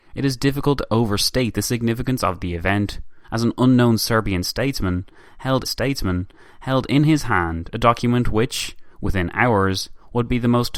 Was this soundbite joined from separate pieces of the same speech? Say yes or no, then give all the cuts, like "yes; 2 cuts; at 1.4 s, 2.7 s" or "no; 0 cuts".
yes; 2 cuts; at 3.2 s, 5.6 s